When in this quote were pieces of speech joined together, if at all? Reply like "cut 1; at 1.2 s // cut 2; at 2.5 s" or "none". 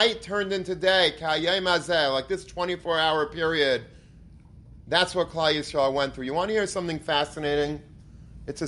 none